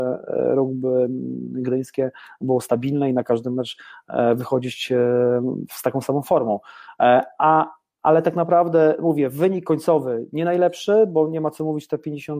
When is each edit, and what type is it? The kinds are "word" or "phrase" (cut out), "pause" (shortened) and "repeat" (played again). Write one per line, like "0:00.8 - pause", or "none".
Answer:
none

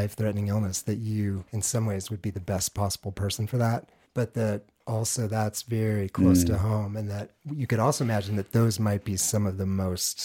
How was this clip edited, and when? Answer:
0:01.5 - pause
0:04.1 - pause

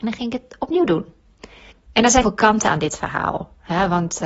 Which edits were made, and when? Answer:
0:01.7 - pause
0:02.2 - word

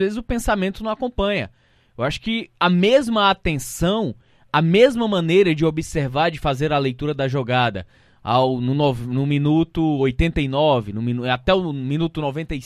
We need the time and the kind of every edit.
none

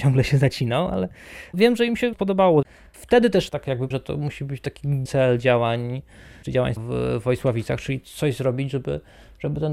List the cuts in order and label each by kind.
0:02.1 - word
0:03.9 - word
0:05.1 - word
0:06.4 - word
0:06.8 - word

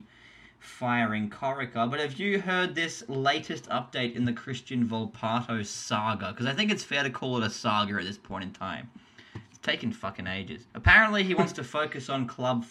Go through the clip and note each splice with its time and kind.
0:10.7 - pause

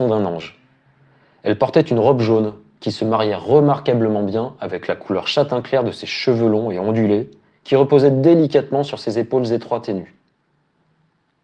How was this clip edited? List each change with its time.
none

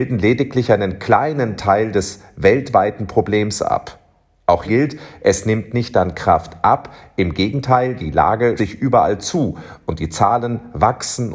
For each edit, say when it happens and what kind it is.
0:04.6 - word
0:08.6 - word

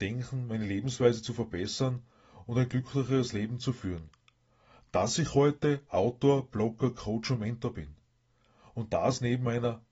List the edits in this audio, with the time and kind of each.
none

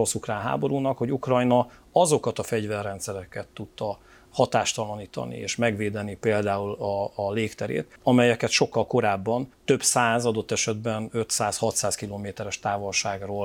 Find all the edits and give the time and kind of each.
0:08.0 - pause
0:09.5 - pause

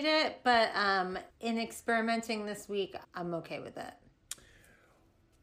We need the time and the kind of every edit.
0:01.3 - pause
0:03.0 - word

